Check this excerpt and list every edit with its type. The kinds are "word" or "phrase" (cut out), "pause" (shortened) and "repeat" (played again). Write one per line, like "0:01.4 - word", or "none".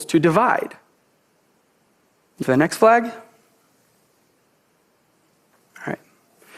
0:02.4 - word